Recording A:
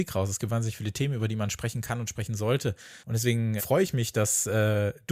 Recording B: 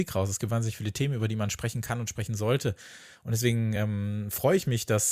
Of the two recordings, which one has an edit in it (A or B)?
A